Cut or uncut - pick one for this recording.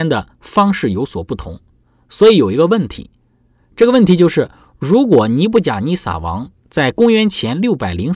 uncut